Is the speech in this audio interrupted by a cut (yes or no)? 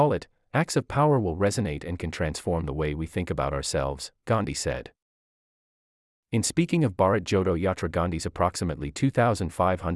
no